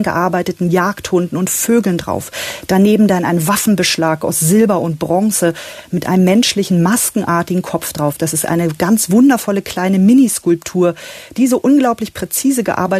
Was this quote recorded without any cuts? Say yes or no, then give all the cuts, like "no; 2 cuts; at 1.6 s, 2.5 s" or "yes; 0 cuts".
yes; 0 cuts